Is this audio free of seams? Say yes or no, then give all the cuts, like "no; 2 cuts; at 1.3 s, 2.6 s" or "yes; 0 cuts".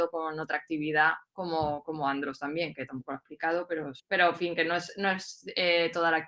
no; 1 cut; at 4.0 s